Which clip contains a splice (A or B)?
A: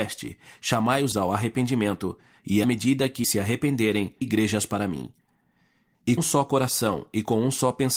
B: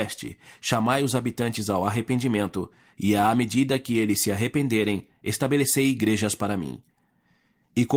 A